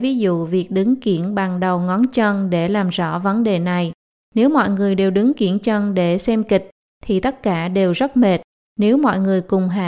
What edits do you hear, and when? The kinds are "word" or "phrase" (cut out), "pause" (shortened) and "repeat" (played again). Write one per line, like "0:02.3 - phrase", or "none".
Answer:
none